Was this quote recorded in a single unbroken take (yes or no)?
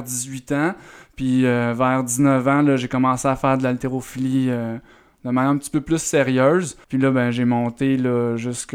no